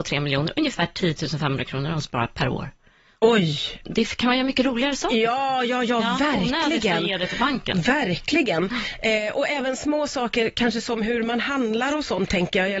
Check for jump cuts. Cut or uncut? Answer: uncut